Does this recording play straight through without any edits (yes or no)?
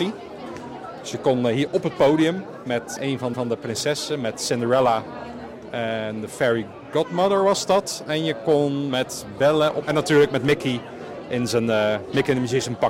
no